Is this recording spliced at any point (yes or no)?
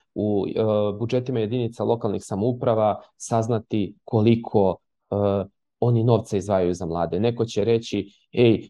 no